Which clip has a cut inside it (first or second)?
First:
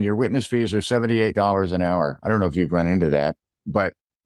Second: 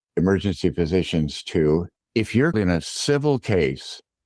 second